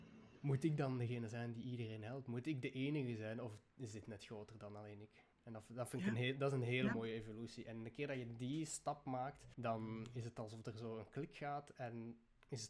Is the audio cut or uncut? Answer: cut